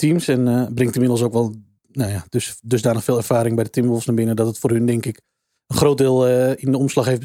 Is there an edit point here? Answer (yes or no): no